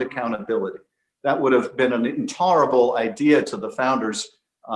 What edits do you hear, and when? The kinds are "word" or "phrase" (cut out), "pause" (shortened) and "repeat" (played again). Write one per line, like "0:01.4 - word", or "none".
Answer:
none